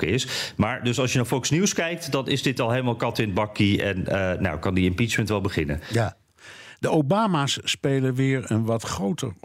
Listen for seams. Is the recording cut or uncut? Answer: uncut